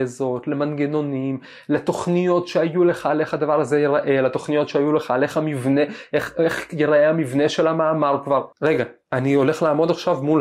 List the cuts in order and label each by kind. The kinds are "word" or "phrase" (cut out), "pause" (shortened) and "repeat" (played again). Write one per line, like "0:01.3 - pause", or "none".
0:08.5 - pause